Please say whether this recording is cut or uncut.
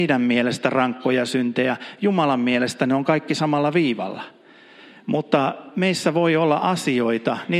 uncut